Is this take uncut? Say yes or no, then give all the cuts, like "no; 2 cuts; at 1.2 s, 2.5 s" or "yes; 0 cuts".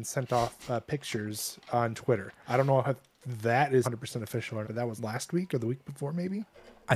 no; 3 cuts; at 3.8 s, 4.6 s, 5.0 s